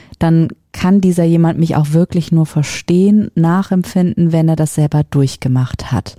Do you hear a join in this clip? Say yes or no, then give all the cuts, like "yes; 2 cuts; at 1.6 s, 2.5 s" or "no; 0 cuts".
no; 0 cuts